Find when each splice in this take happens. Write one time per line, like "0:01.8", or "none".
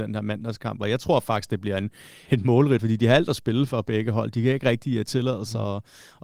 0:02.3
0:02.8